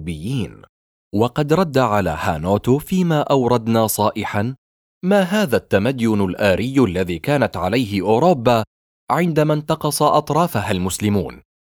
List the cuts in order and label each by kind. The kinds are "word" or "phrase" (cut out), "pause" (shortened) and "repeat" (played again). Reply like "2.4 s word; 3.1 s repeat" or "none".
none